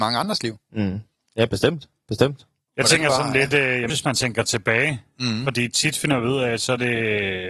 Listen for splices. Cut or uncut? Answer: cut